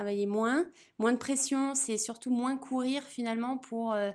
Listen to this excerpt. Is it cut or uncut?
uncut